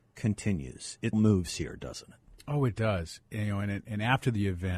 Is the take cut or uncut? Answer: cut